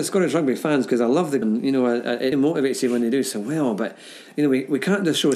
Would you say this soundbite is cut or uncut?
cut